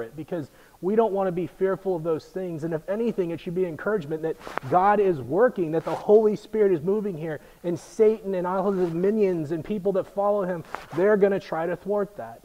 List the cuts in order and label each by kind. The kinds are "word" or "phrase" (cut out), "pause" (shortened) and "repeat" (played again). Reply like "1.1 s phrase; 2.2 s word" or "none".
none